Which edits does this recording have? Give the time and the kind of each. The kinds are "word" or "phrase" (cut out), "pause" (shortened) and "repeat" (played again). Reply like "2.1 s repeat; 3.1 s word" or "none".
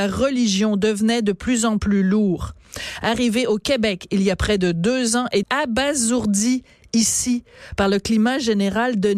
5.4 s phrase